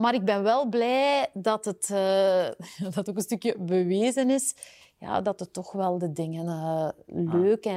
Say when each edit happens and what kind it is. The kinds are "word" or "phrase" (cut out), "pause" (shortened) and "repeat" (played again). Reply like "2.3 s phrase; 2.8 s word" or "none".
none